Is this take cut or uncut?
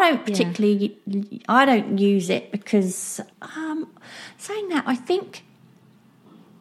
cut